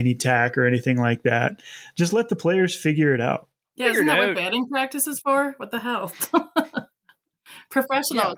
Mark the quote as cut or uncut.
uncut